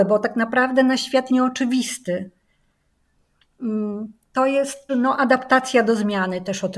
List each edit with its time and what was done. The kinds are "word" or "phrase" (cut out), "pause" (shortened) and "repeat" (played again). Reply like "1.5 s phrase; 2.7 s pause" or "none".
1.3 s word; 4.9 s word